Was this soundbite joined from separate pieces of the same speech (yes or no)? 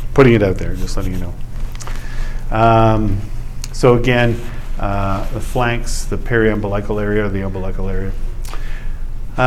no